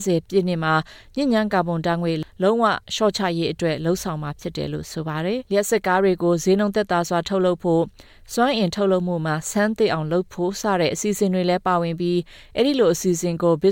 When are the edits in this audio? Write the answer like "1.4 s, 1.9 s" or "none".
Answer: 5.5 s